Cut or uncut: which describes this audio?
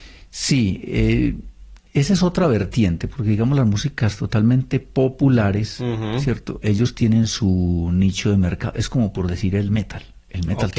uncut